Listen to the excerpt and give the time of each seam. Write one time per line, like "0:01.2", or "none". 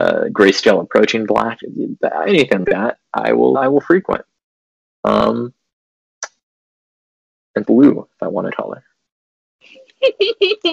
0:02.6
0:03.5
0:07.6
0:08.5